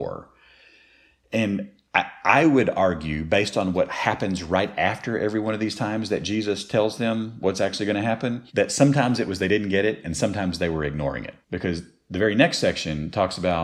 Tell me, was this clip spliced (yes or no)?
yes